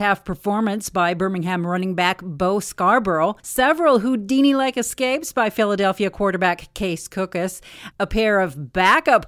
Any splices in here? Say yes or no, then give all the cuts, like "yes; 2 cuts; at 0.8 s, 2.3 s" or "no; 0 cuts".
yes; 1 cut; at 3.4 s